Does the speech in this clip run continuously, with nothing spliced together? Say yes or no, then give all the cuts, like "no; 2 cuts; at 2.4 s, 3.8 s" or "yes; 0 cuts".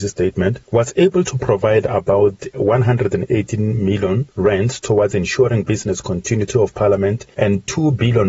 yes; 0 cuts